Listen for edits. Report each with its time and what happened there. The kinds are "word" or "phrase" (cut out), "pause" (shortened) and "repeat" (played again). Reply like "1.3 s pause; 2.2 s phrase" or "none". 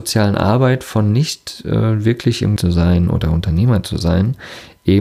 2.6 s phrase